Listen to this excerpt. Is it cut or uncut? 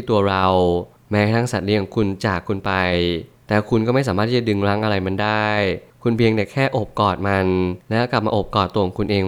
cut